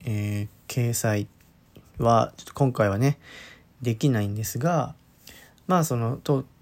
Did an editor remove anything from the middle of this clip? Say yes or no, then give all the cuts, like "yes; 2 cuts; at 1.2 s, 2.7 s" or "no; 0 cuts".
no; 0 cuts